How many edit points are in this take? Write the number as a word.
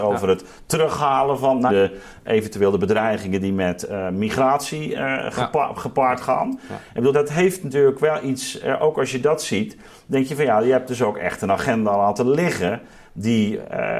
two